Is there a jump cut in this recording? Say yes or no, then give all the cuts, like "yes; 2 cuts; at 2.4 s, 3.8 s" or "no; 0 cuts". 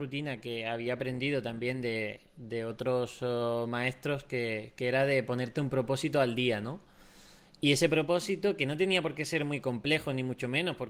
no; 0 cuts